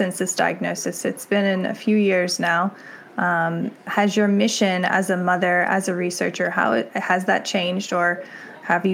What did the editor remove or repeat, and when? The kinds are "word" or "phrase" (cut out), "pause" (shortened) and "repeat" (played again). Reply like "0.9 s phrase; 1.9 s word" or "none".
none